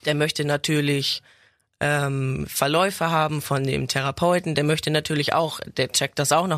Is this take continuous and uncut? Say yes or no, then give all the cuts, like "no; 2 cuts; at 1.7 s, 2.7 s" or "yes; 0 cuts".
yes; 0 cuts